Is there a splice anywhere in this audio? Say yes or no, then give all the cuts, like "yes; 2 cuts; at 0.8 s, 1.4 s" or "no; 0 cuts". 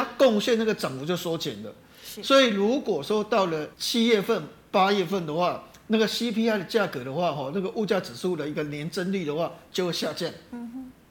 yes; 1 cut; at 3.7 s